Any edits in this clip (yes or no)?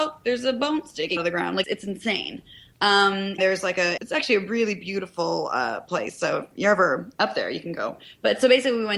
yes